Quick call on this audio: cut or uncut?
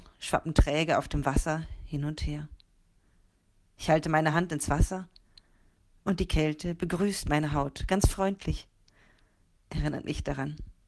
uncut